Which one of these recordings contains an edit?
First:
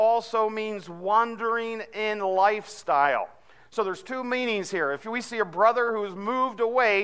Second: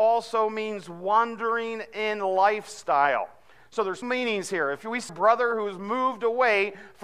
second; 2 cuts; at 4.0 s, 5.1 s

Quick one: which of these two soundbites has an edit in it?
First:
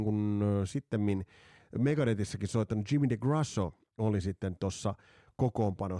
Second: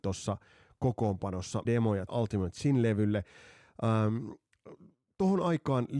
second; 2 cuts; at 1.6 s, 2.1 s

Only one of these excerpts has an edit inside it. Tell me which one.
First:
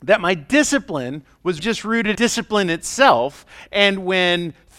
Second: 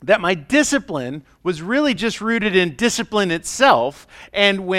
first; 2 cuts; at 1.6 s, 2.1 s

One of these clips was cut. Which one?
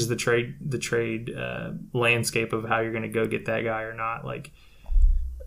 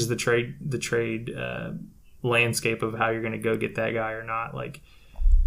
first; 1 cut; at 1.9 s

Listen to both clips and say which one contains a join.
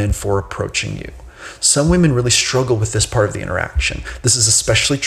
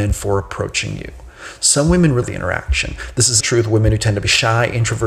second; 2 cuts; at 2.2 s, 3.4 s

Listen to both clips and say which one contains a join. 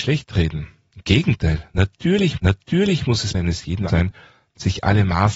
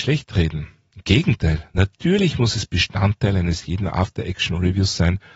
first; 3 cuts; at 2.4 s, 3.3 s, 3.9 s

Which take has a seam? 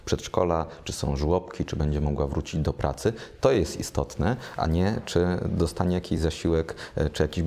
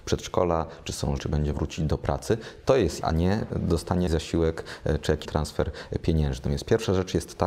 second; 6 cuts; at 1.2 s, 1.5 s, 3.0 s, 3.5 s, 4.1 s, 5.2 s

